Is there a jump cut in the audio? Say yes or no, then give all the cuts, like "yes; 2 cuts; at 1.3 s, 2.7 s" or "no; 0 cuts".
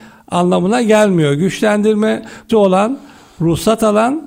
yes; 1 cut; at 2.5 s